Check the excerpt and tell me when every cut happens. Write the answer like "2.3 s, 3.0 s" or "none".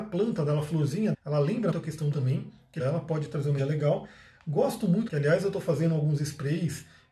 1.1 s, 1.7 s, 2.1 s, 2.8 s, 3.6 s, 5.1 s